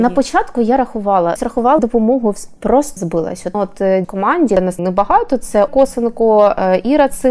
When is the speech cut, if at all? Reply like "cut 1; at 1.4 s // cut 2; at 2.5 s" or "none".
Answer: cut 1; at 1.4 s // cut 2; at 1.8 s // cut 3; at 2.6 s // cut 4; at 3.0 s // cut 5; at 3.5 s // cut 6; at 4.0 s // cut 7; at 4.8 s // cut 8; at 5.7 s